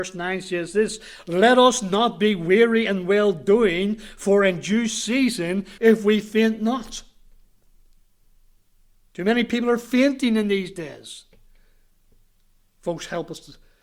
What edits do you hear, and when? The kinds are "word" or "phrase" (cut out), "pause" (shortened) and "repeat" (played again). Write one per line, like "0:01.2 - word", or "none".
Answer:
0:05.8 - phrase

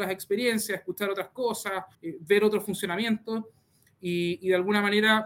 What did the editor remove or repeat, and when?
0:01.9 - pause

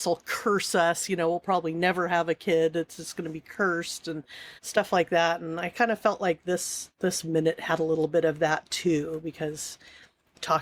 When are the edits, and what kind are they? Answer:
0:04.6 - pause

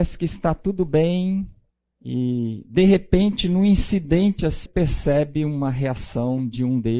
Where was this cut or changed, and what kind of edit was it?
0:01.7 - pause
0:04.7 - word

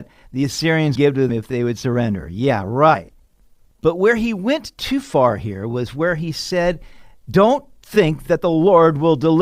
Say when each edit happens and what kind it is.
0:01.0 - word
0:01.3 - word

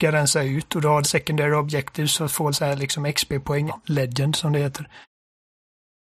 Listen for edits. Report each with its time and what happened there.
0:01.0 - word
0:02.5 - phrase
0:03.7 - word

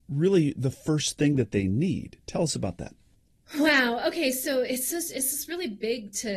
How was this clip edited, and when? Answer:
none

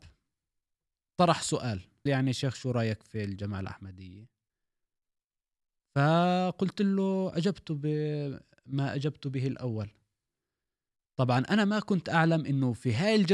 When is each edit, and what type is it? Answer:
0:02.1 - word

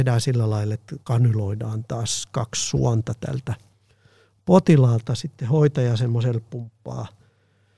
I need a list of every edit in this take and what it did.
0:01.0 - pause
0:06.5 - word

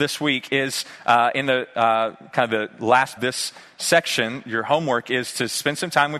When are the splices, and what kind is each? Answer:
0:03.2 - phrase

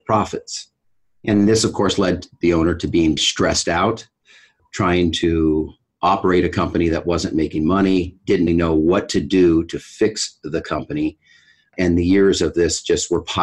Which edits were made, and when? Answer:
0:03.2 - word
0:08.5 - word

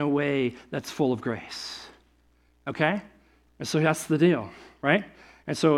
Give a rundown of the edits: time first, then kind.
none

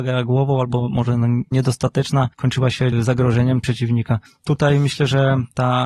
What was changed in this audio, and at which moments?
0:01.5 - word
0:02.3 - pause
0:02.9 - phrase
0:03.6 - phrase

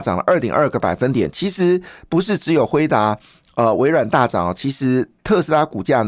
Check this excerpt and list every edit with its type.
none

